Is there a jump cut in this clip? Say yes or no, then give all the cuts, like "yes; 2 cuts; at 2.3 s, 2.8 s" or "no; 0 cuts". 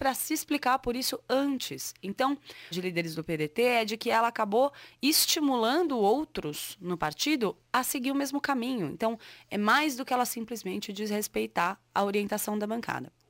yes; 1 cut; at 2.7 s